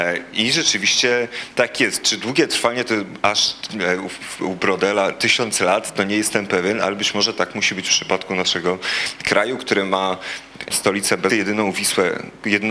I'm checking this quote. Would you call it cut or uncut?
cut